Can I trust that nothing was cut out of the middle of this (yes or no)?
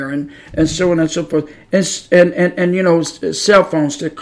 yes